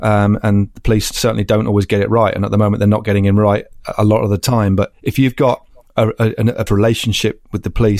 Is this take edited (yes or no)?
yes